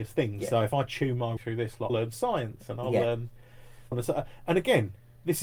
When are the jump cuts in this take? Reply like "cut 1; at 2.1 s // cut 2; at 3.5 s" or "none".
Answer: cut 1; at 1.4 s // cut 2; at 1.9 s // cut 3; at 3.9 s